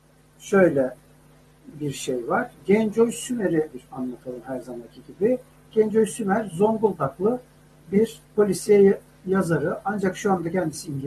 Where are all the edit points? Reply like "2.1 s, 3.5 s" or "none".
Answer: 3.7 s, 8.3 s